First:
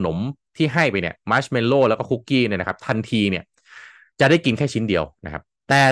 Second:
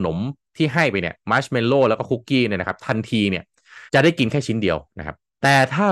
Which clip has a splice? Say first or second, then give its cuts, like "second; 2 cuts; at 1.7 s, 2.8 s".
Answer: second; 1 cut; at 3.9 s